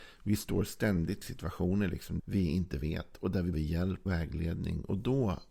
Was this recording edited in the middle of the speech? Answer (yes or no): yes